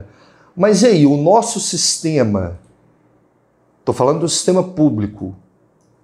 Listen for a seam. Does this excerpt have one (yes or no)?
no